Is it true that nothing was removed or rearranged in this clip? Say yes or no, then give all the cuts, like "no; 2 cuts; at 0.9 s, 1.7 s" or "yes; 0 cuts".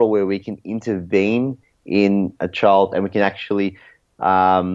yes; 0 cuts